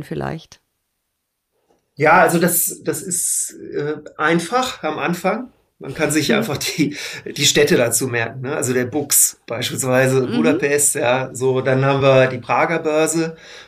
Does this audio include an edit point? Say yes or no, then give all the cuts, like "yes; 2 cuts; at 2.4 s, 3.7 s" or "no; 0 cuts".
no; 0 cuts